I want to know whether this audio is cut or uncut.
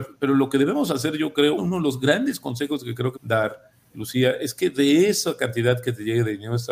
cut